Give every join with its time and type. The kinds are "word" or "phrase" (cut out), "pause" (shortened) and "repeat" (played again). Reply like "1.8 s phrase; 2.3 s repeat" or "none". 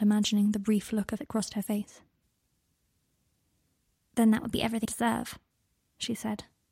1.2 s word; 4.8 s word